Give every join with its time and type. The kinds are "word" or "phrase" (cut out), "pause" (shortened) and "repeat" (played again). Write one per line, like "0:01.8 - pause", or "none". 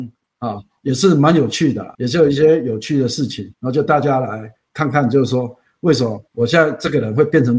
0:01.9 - pause
0:03.5 - pause
0:06.3 - pause